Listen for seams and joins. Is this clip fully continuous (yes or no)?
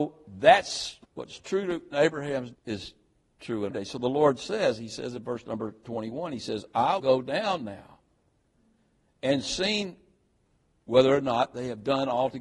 no